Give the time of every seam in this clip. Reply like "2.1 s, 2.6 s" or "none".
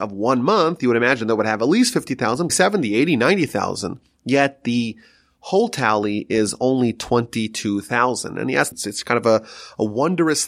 2.5 s, 8.7 s